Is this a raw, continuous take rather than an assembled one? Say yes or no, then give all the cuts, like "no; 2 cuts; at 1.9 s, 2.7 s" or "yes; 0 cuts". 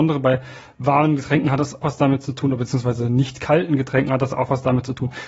no; 1 cut; at 1.8 s